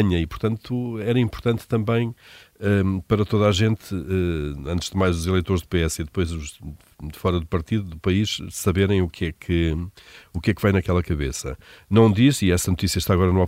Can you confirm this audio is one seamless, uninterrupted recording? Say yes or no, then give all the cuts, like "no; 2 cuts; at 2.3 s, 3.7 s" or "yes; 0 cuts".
yes; 0 cuts